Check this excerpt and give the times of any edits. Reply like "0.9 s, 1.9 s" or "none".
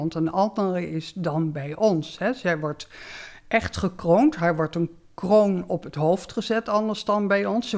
none

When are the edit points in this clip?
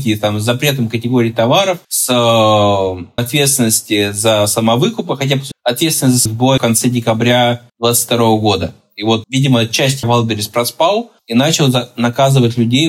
1.8 s, 3.2 s, 5.5 s, 6.3 s, 6.6 s, 7.7 s, 9.2 s, 10.0 s

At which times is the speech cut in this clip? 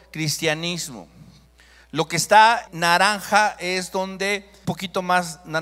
2.7 s, 4.6 s

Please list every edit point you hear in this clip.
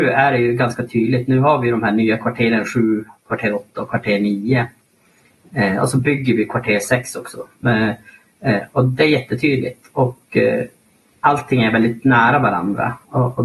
none

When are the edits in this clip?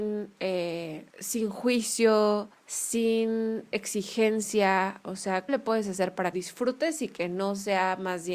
1.1 s, 2.5 s, 5.5 s, 6.3 s

